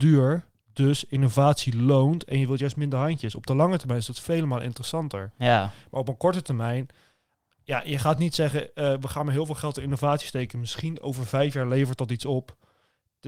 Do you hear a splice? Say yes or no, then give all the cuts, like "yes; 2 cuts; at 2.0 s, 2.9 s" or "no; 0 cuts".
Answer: no; 0 cuts